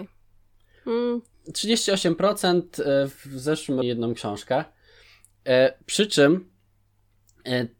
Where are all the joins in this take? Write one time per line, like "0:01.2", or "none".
0:03.8